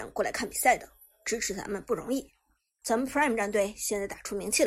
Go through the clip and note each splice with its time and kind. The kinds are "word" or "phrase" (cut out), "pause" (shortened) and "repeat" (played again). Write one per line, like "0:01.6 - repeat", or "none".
none